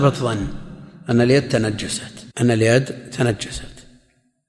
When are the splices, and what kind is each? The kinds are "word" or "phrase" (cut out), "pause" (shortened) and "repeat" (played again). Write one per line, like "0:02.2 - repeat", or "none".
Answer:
0:02.3 - pause